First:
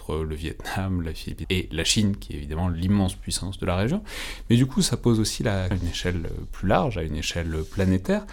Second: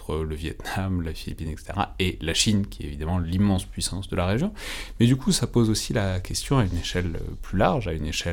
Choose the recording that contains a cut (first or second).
first